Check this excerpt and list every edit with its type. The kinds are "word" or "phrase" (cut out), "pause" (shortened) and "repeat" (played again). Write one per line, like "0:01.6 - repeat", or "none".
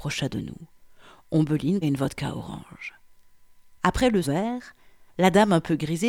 0:01.8 - word
0:04.2 - word